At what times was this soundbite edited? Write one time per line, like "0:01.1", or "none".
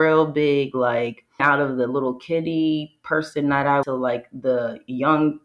0:01.4
0:03.8